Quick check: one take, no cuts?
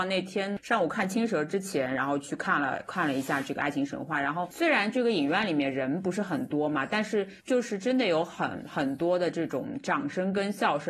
no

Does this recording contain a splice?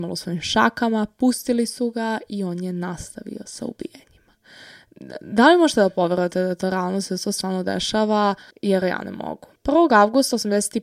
yes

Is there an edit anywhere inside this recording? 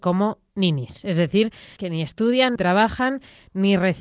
yes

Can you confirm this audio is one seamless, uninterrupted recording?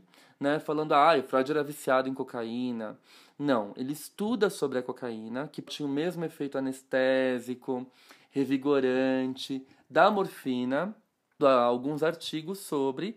no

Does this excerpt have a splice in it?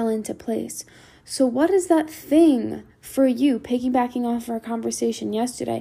yes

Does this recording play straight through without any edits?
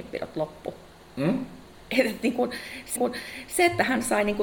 no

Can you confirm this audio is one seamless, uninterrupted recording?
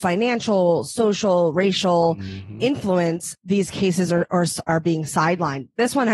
yes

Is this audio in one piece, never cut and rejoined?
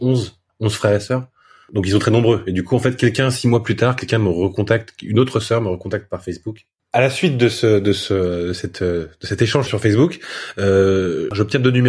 no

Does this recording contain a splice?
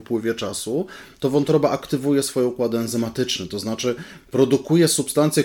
no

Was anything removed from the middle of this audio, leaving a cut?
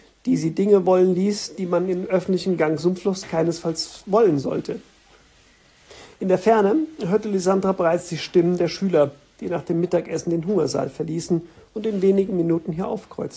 no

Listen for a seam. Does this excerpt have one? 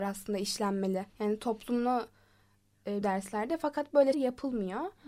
yes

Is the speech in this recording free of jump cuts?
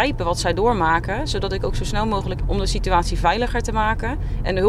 no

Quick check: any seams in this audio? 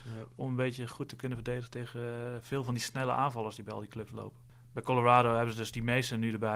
no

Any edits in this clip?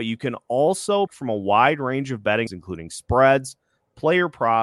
yes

